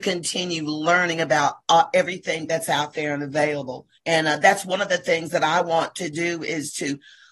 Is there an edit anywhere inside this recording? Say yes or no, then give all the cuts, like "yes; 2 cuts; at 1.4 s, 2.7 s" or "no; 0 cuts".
yes; 1 cut; at 3.9 s